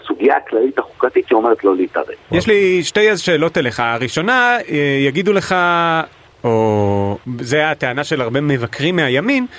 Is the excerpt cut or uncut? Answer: uncut